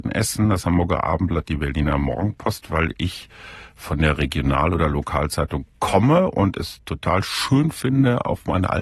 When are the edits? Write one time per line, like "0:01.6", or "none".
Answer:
none